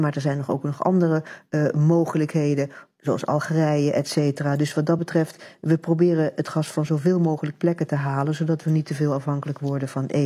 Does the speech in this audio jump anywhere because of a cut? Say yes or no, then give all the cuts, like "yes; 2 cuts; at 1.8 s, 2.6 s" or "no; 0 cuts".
no; 0 cuts